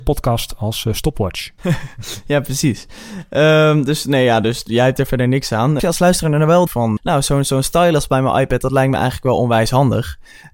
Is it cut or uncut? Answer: cut